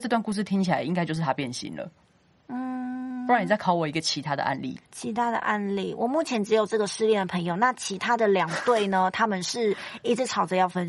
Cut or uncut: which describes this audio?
cut